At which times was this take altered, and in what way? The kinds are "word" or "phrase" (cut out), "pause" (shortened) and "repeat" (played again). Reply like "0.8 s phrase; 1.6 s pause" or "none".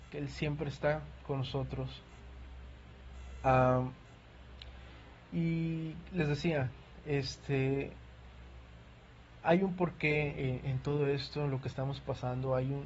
10.6 s word